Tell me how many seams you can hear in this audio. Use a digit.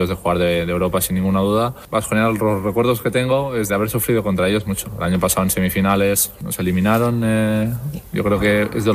1